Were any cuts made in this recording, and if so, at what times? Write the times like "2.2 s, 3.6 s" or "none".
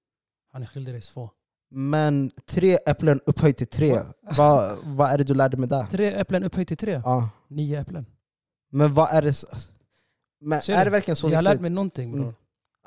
1.4 s